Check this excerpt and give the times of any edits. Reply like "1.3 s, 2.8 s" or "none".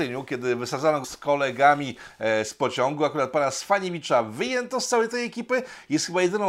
1.0 s